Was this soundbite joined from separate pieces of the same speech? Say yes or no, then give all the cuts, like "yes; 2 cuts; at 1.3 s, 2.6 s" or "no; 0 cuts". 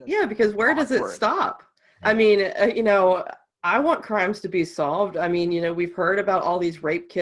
no; 0 cuts